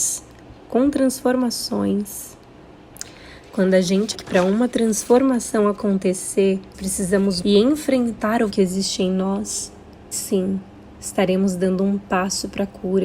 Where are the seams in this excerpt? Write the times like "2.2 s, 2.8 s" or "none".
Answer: 4.1 s, 6.7 s, 7.4 s, 8.5 s, 10.1 s

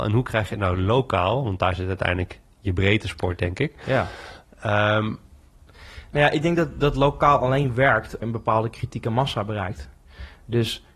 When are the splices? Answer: 8.2 s

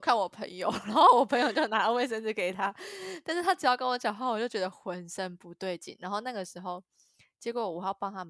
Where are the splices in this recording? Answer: none

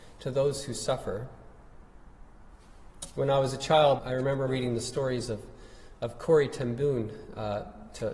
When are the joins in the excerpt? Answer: 4.0 s, 4.5 s

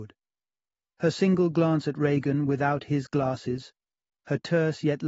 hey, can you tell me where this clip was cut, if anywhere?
none

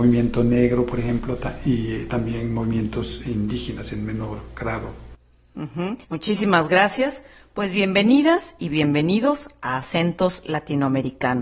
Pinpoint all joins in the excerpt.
6.0 s

